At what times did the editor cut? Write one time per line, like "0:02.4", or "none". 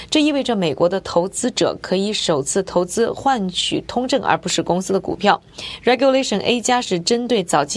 none